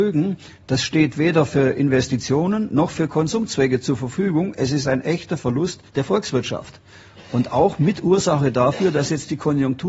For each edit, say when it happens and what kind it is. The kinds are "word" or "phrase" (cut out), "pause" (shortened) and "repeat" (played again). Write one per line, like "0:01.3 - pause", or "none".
0:05.9 - pause